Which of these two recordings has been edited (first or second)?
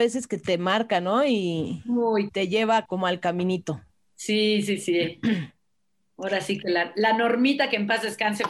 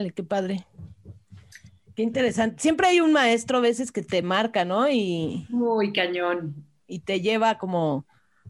first